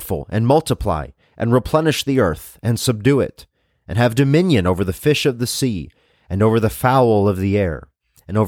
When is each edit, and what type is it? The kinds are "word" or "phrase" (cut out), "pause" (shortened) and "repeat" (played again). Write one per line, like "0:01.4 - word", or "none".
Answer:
none